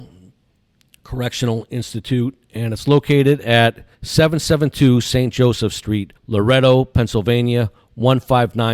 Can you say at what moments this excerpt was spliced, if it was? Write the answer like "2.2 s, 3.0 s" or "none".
3.9 s, 6.2 s